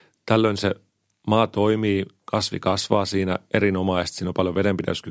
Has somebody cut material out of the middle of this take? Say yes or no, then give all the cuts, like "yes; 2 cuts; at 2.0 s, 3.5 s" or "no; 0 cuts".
no; 0 cuts